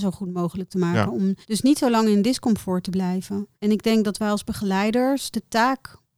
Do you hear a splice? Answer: yes; 2 cuts; at 1.4 s, 3.5 s

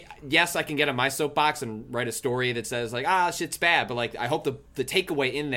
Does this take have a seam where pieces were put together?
no; 0 cuts

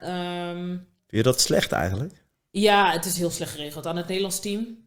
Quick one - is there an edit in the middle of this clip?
no; 0 cuts

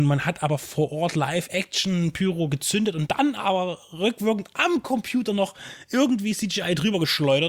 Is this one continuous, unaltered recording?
yes; 0 cuts

